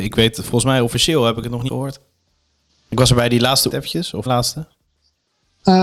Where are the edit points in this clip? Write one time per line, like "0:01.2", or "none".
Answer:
0:01.7
0:03.7
0:04.3